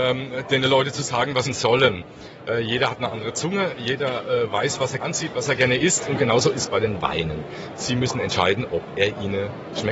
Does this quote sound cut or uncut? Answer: cut